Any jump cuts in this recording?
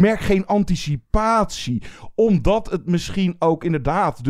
no; 0 cuts

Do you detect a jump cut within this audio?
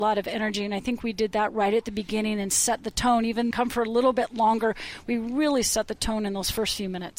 yes; 1 cut; at 3.5 s

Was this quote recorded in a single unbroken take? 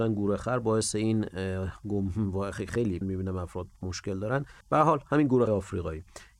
no; 3 cuts; at 3.0 s, 4.6 s, 5.5 s

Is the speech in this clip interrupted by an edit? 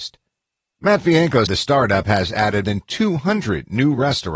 yes; 2 cuts; at 1.5 s, 2.6 s

